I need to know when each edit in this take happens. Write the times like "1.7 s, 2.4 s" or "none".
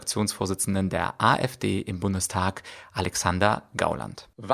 none